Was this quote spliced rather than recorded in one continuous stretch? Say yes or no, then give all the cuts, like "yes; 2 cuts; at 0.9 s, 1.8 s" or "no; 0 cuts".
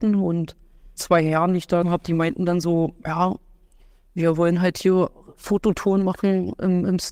yes; 2 cuts; at 1.0 s, 1.8 s